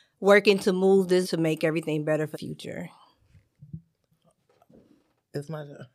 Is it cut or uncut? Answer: cut